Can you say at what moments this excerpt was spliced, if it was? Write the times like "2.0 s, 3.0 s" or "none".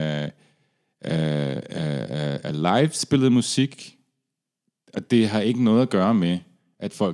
none

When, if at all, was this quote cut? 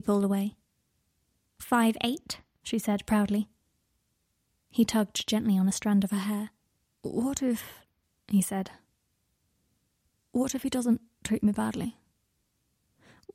none

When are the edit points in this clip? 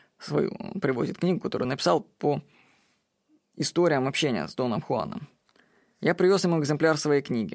none

